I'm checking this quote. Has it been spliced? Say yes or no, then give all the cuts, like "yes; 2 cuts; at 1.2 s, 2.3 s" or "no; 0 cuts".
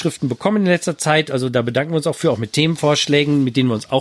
no; 0 cuts